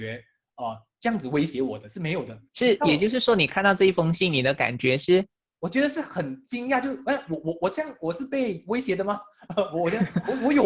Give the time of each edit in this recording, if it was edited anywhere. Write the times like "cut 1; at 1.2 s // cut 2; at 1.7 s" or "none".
cut 1; at 2.5 s